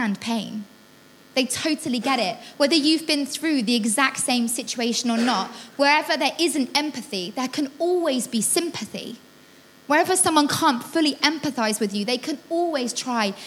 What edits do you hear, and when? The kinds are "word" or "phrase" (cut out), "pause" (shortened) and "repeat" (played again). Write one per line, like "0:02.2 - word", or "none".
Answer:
none